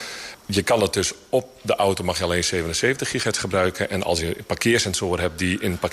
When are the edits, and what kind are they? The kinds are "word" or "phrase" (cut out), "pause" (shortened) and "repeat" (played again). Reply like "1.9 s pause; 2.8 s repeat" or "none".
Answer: none